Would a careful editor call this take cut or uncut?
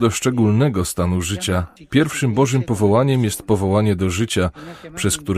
uncut